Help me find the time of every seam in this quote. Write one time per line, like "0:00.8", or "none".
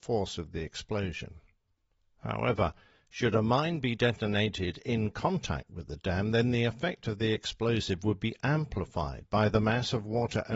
none